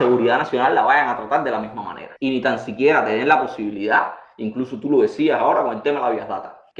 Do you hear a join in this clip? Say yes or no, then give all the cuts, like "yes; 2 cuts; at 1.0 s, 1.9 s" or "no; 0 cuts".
yes; 1 cut; at 2.2 s